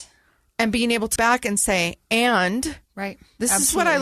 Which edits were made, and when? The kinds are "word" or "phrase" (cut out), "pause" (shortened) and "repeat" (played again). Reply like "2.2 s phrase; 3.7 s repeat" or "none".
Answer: 1.2 s word; 2.9 s pause